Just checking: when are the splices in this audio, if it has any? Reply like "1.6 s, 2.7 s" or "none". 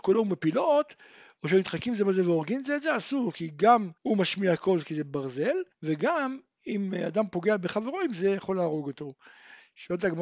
4.0 s, 5.7 s